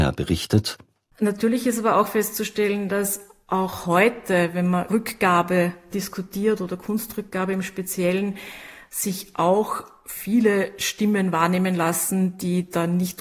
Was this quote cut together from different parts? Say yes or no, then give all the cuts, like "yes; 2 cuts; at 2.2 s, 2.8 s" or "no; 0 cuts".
yes; 1 cut; at 4.9 s